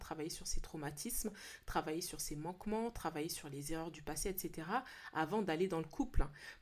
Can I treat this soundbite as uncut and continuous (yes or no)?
yes